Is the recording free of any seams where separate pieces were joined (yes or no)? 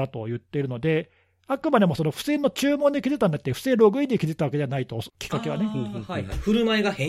yes